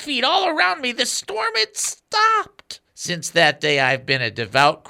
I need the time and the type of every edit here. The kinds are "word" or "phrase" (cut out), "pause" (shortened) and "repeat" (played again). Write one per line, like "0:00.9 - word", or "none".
0:02.9 - pause

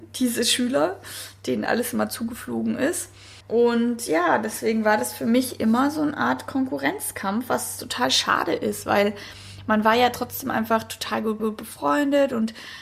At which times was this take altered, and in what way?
0:03.4 - pause
0:11.4 - repeat

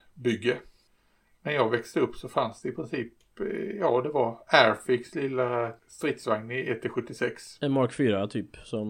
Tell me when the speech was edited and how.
0:05.8 - pause

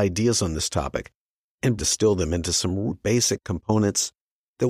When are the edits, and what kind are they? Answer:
0:01.8 - phrase
0:02.9 - word

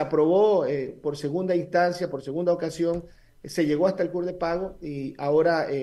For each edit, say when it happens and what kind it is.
none

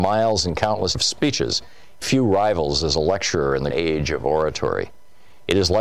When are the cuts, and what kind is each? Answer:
0:00.9 - word
0:02.0 - word
0:03.7 - word

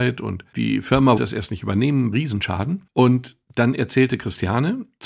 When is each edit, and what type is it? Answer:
0:01.2 - word
0:02.1 - phrase

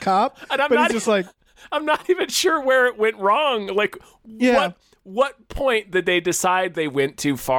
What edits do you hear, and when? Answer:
none

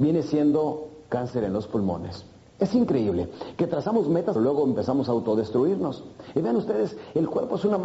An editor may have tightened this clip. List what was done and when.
0:04.4 - phrase

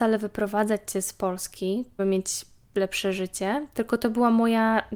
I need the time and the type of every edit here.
0:02.0 - word

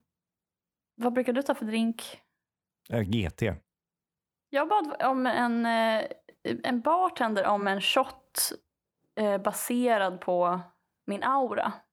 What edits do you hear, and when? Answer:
none

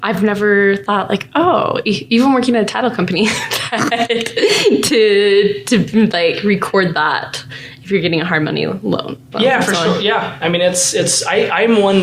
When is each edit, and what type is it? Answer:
0:09.3 - word

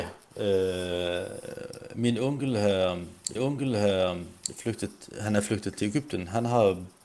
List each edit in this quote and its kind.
0:03.4 - repeat

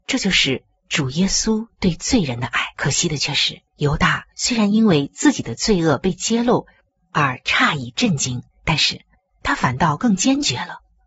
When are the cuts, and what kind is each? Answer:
0:02.7 - pause
0:03.7 - pause
0:04.3 - pause
0:08.5 - pause

